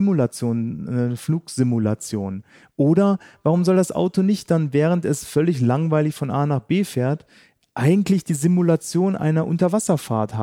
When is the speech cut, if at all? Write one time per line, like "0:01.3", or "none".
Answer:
none